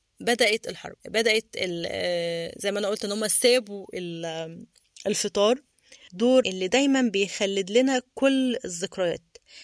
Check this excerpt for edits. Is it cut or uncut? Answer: cut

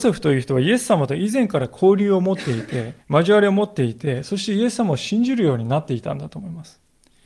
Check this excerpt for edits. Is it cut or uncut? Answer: cut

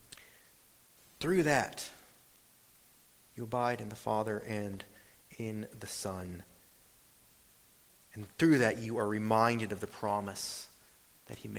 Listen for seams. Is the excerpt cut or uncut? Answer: uncut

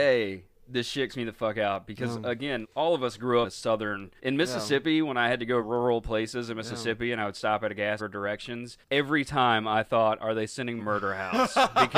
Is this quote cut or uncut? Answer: cut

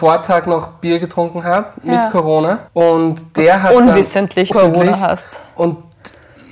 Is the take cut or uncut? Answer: cut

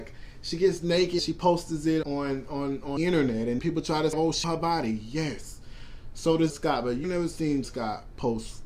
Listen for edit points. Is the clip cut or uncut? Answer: cut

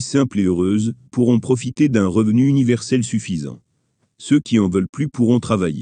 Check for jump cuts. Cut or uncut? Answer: uncut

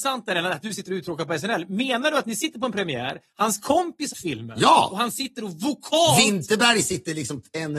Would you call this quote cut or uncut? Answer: cut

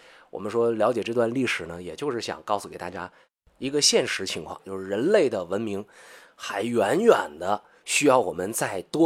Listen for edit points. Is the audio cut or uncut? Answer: uncut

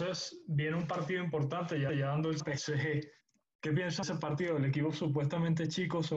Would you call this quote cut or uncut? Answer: cut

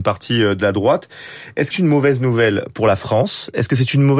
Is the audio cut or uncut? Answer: cut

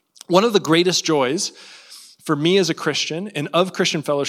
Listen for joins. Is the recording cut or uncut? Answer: uncut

